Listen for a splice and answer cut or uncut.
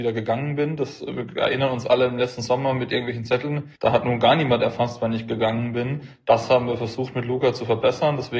cut